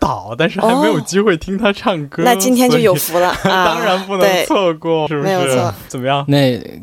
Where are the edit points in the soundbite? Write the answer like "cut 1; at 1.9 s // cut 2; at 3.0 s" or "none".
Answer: cut 1; at 5.1 s // cut 2; at 5.9 s